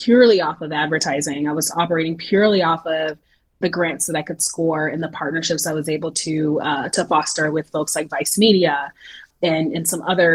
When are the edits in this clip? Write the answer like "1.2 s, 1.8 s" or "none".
none